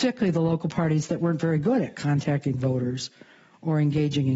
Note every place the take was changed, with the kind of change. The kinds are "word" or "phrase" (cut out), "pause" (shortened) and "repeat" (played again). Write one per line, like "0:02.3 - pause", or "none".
none